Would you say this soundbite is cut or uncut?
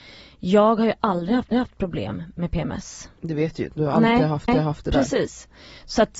cut